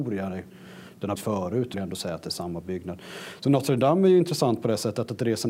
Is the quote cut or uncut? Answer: cut